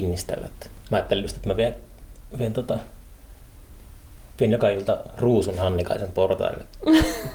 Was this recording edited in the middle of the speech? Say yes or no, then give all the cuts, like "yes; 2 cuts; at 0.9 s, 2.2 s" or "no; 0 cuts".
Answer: no; 0 cuts